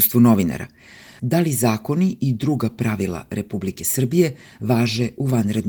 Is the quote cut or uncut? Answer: uncut